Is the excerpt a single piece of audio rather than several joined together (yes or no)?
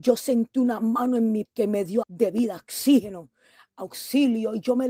no